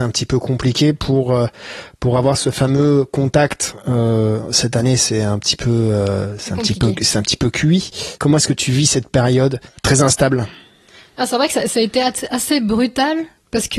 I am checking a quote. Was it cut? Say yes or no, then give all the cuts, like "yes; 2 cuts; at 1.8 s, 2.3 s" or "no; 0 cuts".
no; 0 cuts